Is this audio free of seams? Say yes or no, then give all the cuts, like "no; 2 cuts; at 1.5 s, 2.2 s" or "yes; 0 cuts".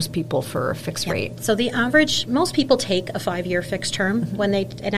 yes; 0 cuts